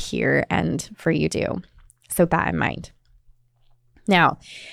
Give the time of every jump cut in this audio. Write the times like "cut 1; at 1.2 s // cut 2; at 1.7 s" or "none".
cut 1; at 1.3 s // cut 2; at 2.3 s